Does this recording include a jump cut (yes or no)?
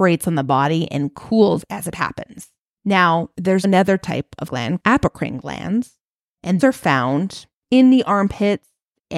yes